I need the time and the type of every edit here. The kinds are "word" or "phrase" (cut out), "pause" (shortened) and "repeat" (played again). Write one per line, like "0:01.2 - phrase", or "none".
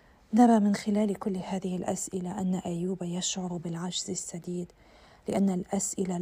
none